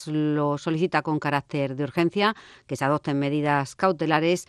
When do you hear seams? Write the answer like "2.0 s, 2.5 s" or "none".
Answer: none